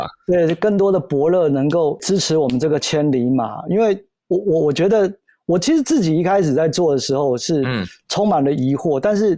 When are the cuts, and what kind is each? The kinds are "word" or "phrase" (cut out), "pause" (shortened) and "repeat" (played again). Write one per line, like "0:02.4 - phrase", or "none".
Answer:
none